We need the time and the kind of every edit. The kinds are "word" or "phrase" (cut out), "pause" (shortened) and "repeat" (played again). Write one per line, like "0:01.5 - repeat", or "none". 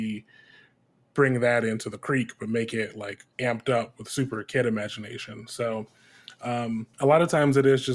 0:03.3 - pause
0:06.9 - pause